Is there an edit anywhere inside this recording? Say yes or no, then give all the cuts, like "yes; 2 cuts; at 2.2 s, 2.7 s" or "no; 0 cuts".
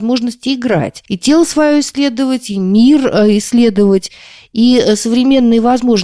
no; 0 cuts